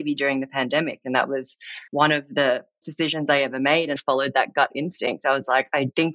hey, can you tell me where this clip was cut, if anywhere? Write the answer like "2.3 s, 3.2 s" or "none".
1.9 s, 2.8 s, 4.0 s